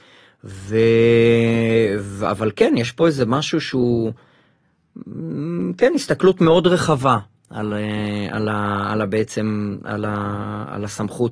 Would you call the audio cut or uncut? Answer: uncut